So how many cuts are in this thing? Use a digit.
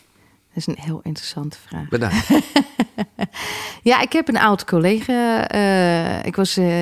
0